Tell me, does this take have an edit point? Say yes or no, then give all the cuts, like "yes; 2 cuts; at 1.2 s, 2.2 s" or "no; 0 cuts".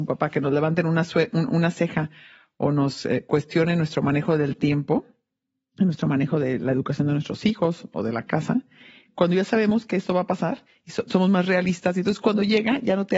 no; 0 cuts